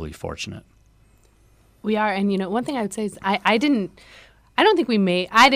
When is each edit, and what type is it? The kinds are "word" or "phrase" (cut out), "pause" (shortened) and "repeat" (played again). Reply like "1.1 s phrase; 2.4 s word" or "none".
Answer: none